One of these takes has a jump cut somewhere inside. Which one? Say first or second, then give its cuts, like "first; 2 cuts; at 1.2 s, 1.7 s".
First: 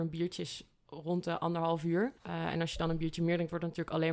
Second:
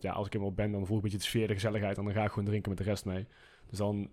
first; 1 cut; at 2.2 s